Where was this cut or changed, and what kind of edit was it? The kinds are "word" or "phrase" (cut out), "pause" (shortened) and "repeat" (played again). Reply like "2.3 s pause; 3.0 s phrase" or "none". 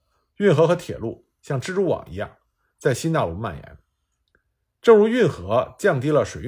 none